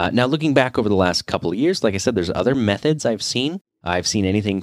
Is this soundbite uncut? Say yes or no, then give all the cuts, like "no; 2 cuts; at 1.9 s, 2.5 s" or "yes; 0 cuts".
yes; 0 cuts